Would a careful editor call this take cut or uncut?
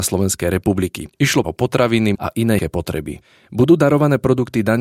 cut